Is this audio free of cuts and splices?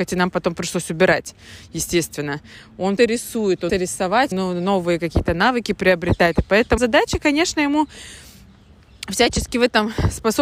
no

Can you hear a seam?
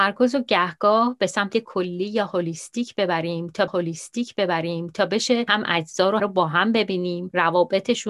yes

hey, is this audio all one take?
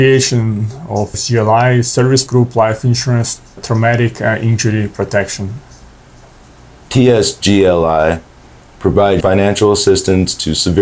no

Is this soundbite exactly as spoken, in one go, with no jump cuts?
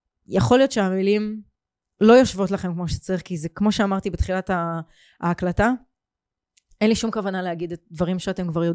yes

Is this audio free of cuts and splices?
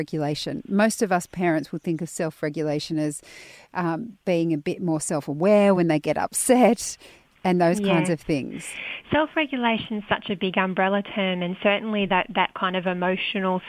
yes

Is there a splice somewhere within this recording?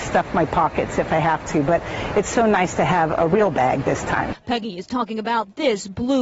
no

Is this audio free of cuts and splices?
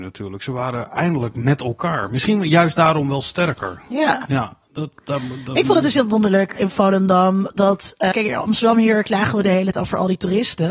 no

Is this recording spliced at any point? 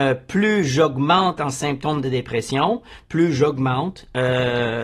no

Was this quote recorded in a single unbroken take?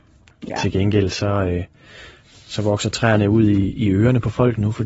yes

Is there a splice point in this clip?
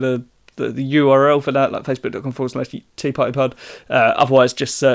no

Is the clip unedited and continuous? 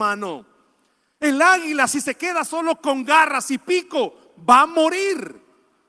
yes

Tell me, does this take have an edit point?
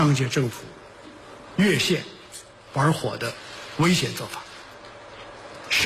no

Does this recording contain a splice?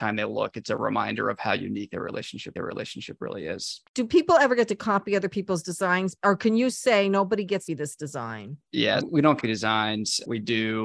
yes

